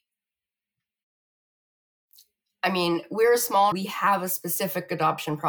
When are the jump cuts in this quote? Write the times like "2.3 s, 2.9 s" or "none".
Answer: 3.7 s